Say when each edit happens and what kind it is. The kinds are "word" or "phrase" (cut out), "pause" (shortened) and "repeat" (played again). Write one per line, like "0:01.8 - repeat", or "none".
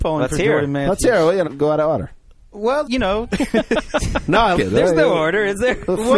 0:01.4 - word
0:02.8 - word
0:04.5 - word